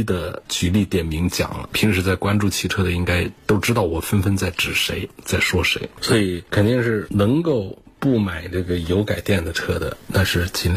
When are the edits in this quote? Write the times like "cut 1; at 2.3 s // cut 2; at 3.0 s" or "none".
cut 1; at 3.4 s